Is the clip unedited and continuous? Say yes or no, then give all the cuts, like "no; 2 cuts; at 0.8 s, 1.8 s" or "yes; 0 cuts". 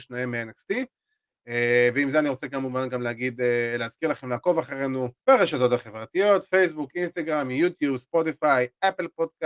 no; 1 cut; at 5.2 s